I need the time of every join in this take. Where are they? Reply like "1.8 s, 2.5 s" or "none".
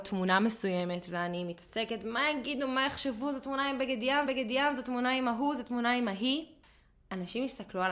4.3 s